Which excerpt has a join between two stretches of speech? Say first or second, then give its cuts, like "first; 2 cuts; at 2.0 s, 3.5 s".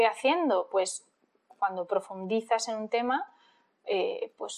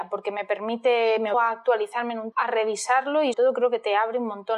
second; 3 cuts; at 1.3 s, 2.3 s, 3.3 s